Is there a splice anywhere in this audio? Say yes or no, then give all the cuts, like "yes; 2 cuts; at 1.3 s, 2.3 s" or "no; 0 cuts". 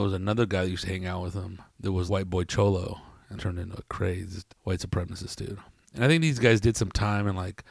yes; 4 cuts; at 1.7 s, 2.1 s, 3.4 s, 4.5 s